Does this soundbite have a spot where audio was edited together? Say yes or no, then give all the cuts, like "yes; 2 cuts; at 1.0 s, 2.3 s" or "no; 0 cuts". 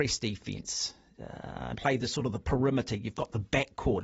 yes; 1 cut; at 1.7 s